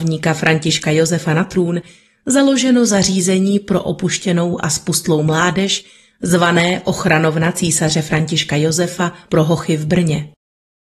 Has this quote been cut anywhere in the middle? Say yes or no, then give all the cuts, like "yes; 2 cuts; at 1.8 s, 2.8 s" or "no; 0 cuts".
no; 0 cuts